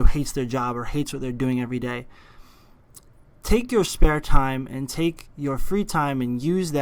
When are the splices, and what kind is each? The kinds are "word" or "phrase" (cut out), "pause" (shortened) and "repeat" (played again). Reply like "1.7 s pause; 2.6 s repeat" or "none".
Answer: none